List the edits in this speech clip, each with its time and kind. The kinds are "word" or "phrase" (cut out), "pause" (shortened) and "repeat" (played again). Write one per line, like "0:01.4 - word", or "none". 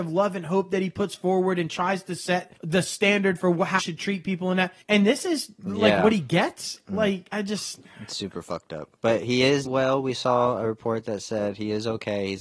0:02.6 - pause
0:03.8 - word
0:04.8 - pause
0:07.3 - word
0:09.0 - pause
0:09.7 - word